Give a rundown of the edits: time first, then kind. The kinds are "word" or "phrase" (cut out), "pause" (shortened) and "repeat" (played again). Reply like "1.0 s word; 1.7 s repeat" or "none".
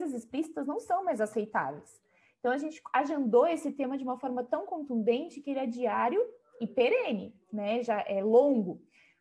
none